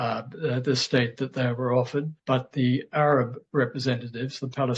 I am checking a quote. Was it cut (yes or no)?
yes